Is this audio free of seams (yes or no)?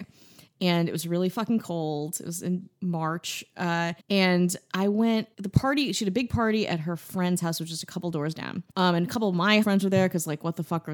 no